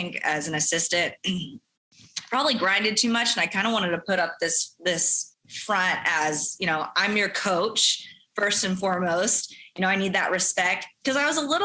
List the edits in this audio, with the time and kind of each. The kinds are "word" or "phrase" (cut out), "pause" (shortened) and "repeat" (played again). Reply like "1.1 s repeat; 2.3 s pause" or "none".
none